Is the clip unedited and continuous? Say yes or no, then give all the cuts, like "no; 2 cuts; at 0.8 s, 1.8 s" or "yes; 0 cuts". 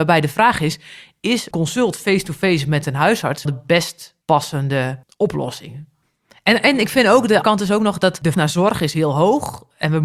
no; 4 cuts; at 1.5 s, 3.4 s, 7.4 s, 8.3 s